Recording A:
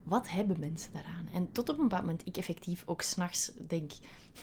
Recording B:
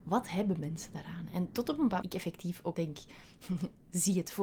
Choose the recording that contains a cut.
B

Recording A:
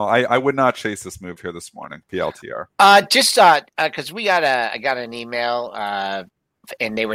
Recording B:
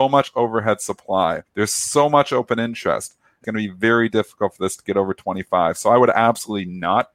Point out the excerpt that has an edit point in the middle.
B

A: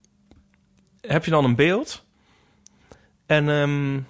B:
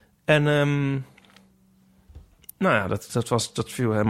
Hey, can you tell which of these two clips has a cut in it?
B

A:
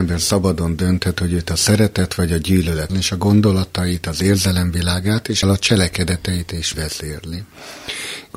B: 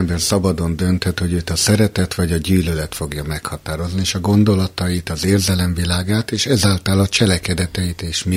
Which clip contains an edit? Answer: A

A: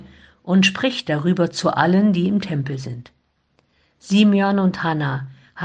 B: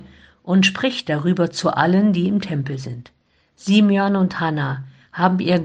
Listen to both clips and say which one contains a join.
B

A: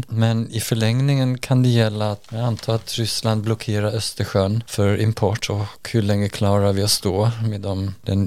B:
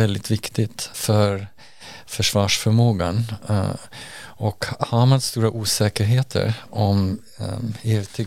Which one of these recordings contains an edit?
B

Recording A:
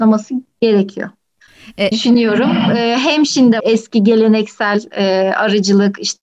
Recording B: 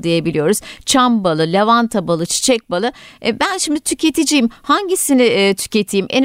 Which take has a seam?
A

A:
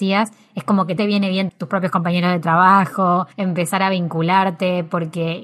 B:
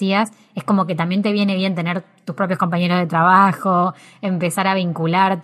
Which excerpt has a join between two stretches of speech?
A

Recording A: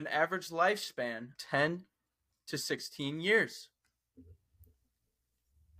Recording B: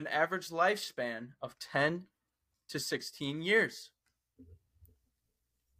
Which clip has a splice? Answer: A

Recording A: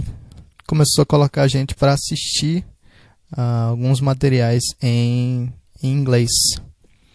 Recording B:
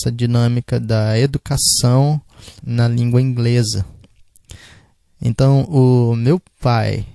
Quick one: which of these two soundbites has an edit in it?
B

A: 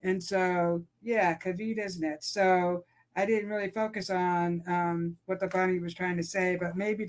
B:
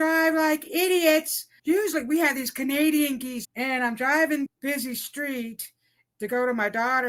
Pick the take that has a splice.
B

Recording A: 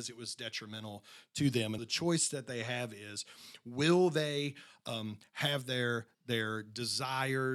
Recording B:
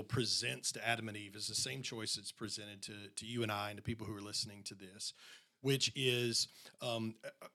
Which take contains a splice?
A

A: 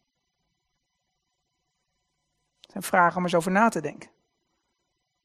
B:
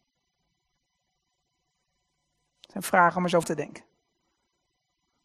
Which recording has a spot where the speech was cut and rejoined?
B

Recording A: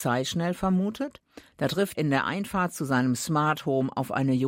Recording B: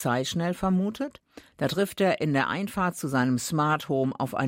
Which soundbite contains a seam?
A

